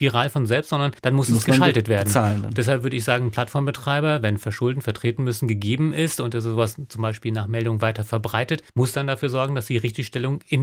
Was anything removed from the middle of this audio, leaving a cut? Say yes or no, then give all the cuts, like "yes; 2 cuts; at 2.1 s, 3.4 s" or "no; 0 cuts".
yes; 2 cuts; at 1.0 s, 8.7 s